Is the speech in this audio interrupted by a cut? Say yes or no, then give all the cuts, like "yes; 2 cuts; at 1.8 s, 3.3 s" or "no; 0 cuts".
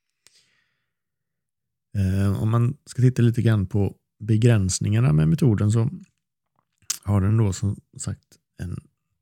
no; 0 cuts